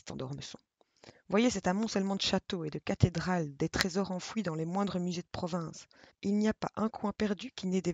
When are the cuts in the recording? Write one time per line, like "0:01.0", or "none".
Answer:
0:06.1